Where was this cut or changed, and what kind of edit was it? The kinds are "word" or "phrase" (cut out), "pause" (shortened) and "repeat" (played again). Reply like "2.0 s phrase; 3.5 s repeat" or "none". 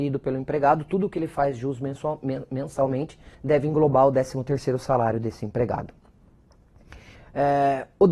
3.3 s pause; 7.1 s pause